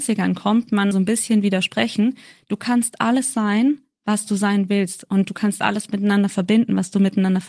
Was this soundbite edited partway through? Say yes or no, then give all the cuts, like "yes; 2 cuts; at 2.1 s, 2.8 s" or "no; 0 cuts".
yes; 1 cut; at 0.9 s